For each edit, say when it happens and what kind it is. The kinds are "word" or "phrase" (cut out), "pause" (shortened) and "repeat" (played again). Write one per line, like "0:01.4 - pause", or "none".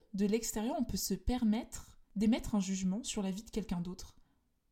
none